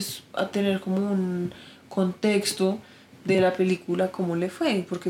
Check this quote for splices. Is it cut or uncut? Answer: uncut